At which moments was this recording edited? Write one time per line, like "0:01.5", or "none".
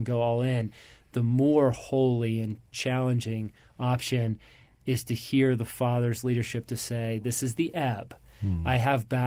none